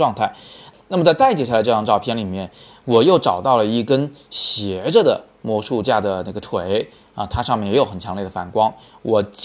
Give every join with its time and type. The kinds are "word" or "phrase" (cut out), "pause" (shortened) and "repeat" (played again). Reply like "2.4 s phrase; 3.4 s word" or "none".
none